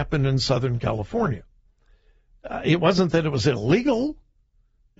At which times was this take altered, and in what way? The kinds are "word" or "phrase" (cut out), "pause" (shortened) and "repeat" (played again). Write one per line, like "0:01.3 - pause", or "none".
none

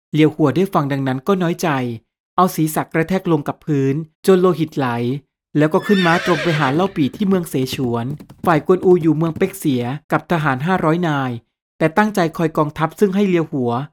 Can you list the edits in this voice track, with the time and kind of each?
0:04.1 - pause
0:08.4 - pause
0:10.0 - pause

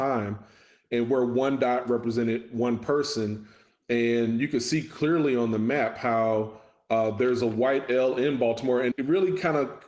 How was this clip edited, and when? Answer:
0:08.9 - word

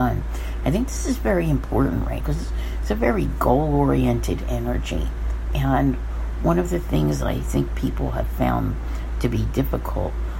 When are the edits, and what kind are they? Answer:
0:02.2 - word

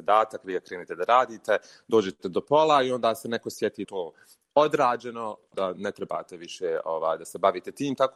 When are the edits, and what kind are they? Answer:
0:03.8 - phrase

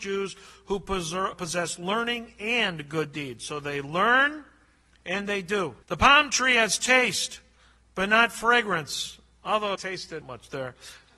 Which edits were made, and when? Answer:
0:01.3 - word
0:05.8 - pause
0:09.7 - phrase
0:10.2 - phrase

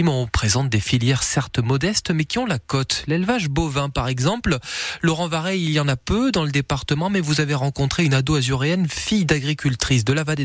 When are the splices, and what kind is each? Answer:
none

